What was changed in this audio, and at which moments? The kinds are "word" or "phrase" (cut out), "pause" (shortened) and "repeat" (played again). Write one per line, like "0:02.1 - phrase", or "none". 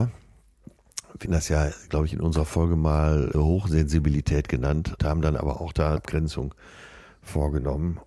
0:01.3 - word
0:03.3 - word
0:05.0 - word
0:06.0 - word

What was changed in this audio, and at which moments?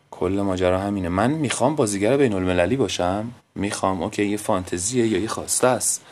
0:03.4 - pause

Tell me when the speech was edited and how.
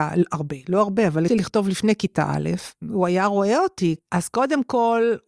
0:01.3 - word
0:02.8 - pause

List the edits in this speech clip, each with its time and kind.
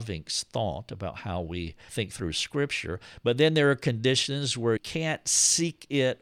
0:01.9 - word
0:04.8 - word

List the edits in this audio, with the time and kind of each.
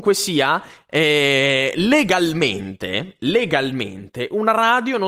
none

